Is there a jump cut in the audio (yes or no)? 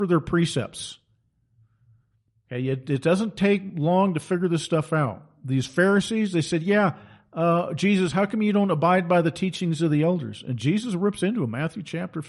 no